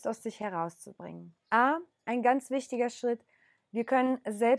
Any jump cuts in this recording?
yes; 1 cut; at 1.4 s

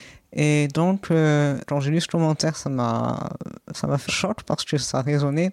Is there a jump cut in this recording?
yes; 2 cuts; at 1.7 s, 4.1 s

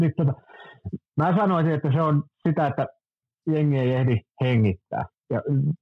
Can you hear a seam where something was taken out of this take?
yes; 1 cut; at 3.2 s

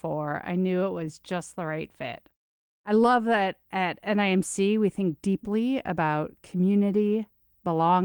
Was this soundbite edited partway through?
no; 0 cuts

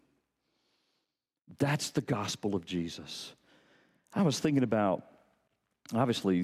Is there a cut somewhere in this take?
no; 0 cuts

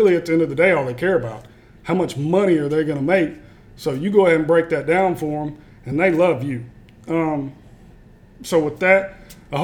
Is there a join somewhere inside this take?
no; 0 cuts

